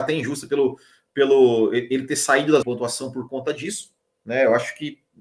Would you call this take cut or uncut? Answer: cut